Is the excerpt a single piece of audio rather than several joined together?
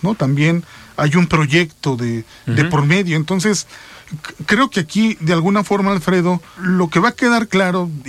no; 1 cut; at 6.6 s

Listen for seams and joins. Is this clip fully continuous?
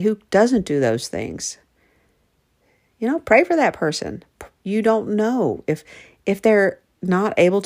yes; 0 cuts

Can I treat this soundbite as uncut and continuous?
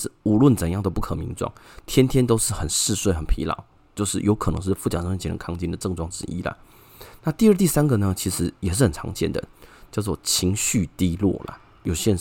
yes; 0 cuts

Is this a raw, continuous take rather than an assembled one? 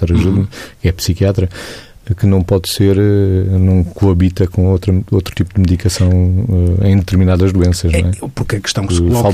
yes; 0 cuts

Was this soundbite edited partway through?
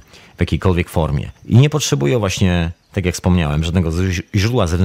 yes; 1 cut; at 1.4 s

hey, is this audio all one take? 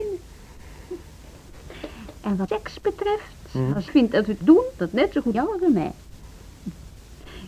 no; 5 cuts; at 2.5 s, 3.9 s, 4.4 s, 4.8 s, 5.3 s

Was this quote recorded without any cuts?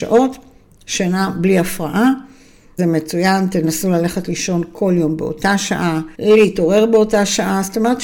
no; 2 cuts; at 2.8 s, 6.1 s

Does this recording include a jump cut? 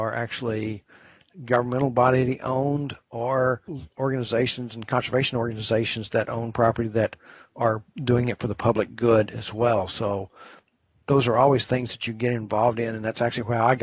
no; 0 cuts

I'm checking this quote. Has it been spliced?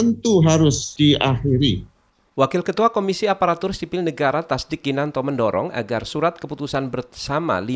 no; 0 cuts

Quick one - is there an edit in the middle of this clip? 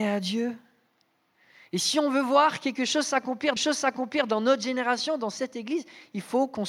yes; 1 cut; at 3.6 s

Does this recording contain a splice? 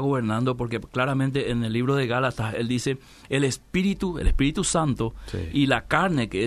no; 0 cuts

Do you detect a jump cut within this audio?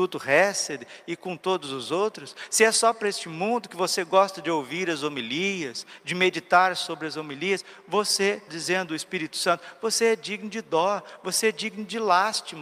yes; 1 cut; at 8.5 s

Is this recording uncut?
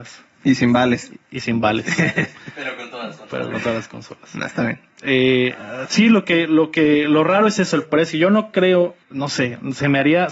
no; 2 cuts; at 4.9 s, 9.0 s

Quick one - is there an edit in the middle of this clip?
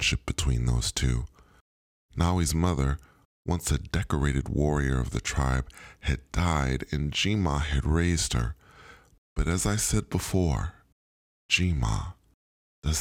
no; 0 cuts

